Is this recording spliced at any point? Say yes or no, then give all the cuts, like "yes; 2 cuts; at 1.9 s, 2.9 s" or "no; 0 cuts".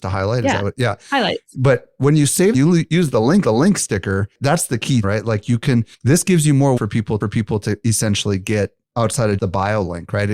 yes; 8 cuts; at 2.5 s, 3.4 s, 5.0 s, 5.9 s, 6.8 s, 7.2 s, 8.8 s, 9.4 s